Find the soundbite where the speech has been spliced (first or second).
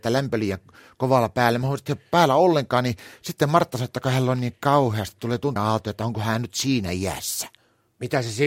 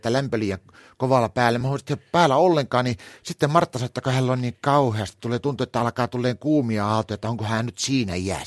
first